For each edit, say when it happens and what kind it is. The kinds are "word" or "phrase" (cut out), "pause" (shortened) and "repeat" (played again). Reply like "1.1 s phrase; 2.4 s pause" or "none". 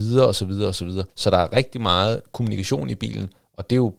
1.1 s pause